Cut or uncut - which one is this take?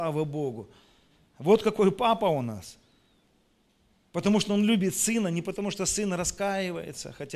uncut